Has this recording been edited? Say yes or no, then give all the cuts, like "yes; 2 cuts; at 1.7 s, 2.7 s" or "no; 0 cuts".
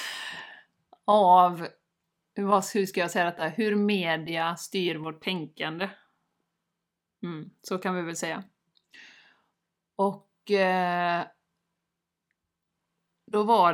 no; 0 cuts